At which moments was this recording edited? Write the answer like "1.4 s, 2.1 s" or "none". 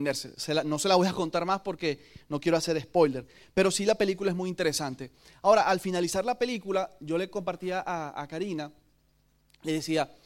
none